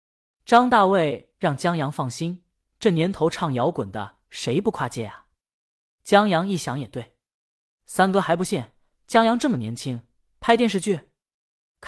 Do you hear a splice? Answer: no; 0 cuts

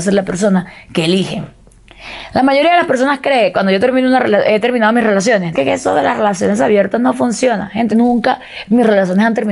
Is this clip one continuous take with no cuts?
no; 2 cuts; at 5.5 s, 7.9 s

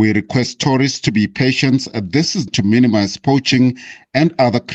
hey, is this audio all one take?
no; 1 cut; at 2.5 s

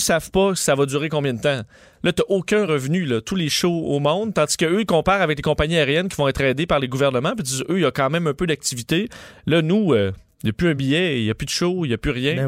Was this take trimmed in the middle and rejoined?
no; 0 cuts

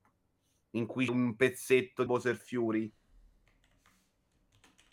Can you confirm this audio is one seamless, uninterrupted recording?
no; 2 cuts; at 1.1 s, 2.1 s

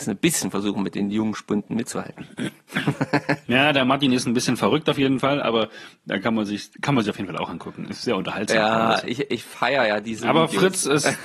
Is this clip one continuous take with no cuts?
yes; 0 cuts

